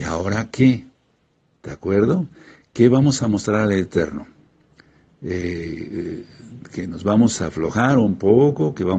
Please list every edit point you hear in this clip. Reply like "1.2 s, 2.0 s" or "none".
none